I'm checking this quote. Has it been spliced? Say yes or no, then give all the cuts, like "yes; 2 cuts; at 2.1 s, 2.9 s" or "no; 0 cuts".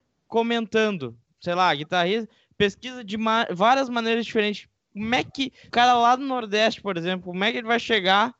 yes; 1 cut; at 5.7 s